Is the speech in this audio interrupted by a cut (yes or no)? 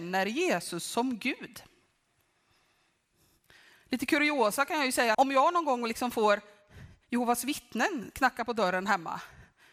yes